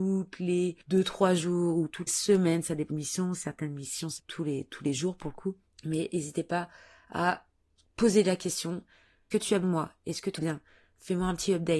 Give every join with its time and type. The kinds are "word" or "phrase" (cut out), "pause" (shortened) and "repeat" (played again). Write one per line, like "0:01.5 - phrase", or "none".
0:02.1 - word
0:02.9 - word
0:04.2 - word
0:09.3 - word
0:09.6 - word
0:10.4 - word